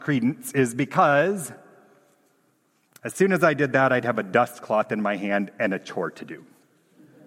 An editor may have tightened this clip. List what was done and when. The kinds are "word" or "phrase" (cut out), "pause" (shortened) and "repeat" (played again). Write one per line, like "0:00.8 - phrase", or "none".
none

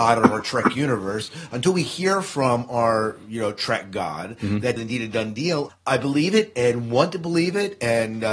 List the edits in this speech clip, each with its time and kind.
0:04.8 - phrase
0:05.7 - word

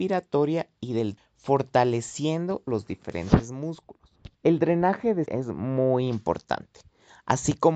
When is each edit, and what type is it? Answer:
0:01.2 - word
0:02.7 - phrase
0:04.3 - pause
0:05.3 - word

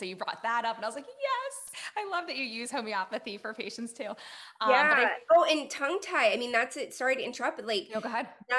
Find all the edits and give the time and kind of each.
none

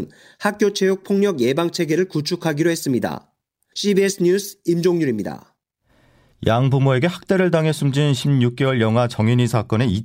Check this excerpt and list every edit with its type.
none

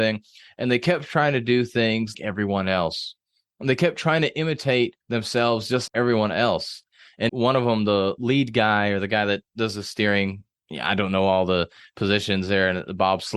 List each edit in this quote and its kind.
0:02.1 - word
0:05.0 - pause
0:05.9 - word
0:07.3 - word

